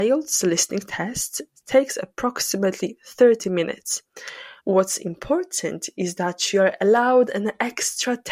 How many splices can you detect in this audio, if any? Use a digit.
1